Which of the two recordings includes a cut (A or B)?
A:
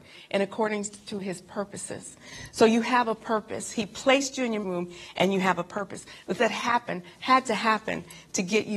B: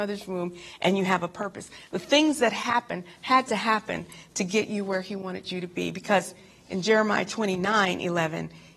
A